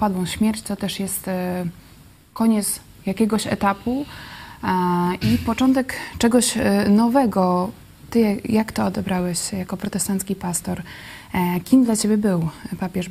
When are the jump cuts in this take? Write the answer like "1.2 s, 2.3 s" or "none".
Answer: none